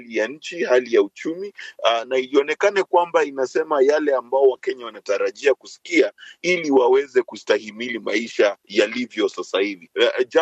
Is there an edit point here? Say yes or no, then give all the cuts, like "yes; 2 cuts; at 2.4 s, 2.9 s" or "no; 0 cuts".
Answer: no; 0 cuts